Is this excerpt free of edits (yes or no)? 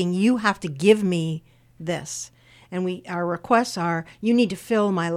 yes